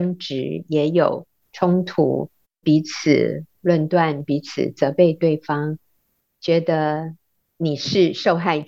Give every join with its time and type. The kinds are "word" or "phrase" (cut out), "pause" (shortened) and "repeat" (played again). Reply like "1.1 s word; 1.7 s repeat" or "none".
none